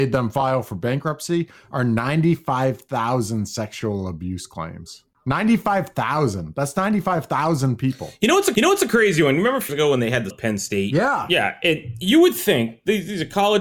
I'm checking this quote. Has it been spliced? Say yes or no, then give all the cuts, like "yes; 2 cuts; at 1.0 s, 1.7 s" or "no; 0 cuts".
yes; 3 cuts; at 8.6 s, 9.7 s, 10.3 s